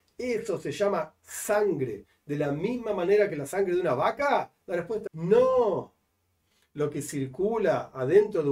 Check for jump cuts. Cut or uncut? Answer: cut